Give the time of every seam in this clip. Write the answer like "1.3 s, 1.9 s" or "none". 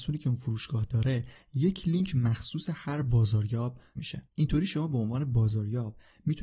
4.0 s, 4.3 s